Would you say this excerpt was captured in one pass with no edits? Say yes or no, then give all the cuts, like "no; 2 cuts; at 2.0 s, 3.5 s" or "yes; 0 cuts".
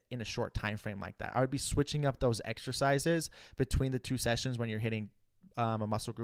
yes; 0 cuts